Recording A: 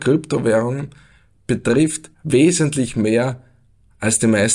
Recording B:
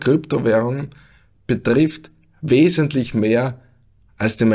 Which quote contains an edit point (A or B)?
A